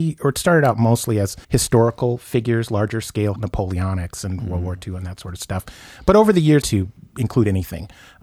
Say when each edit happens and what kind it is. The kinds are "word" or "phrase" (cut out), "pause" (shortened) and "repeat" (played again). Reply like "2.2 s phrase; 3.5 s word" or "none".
1.4 s pause; 3.4 s word; 6.6 s phrase